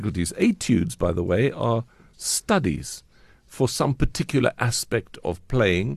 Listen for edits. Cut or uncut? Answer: uncut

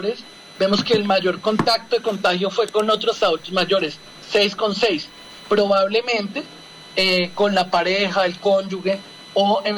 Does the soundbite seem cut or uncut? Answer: uncut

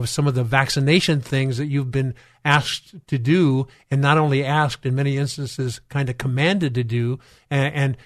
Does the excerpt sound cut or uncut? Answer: uncut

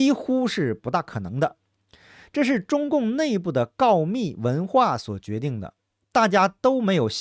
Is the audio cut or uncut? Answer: uncut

